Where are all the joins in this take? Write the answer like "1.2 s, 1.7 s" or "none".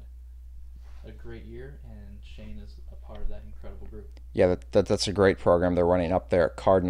none